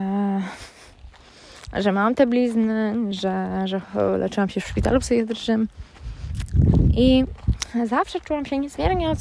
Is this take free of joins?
yes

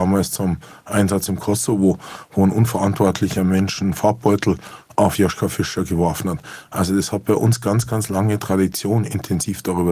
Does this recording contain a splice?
no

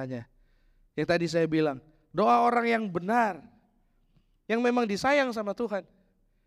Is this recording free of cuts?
yes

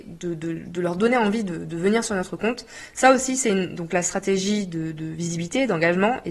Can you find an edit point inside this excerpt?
no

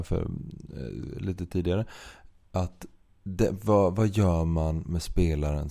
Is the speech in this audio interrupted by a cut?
no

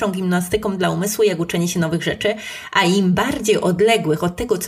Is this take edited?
no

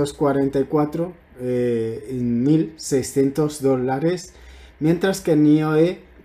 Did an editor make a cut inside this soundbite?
no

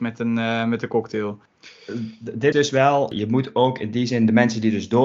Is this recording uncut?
no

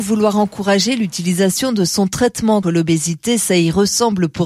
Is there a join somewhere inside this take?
yes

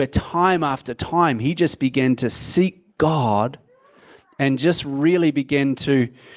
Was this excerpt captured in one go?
yes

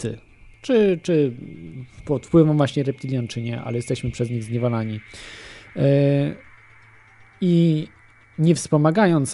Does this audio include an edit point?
no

